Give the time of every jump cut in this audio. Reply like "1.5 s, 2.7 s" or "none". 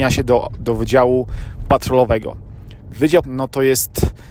3.2 s